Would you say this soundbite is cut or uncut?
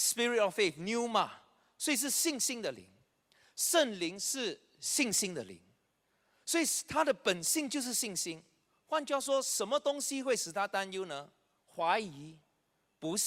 uncut